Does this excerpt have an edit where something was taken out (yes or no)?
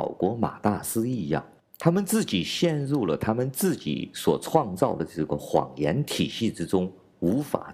yes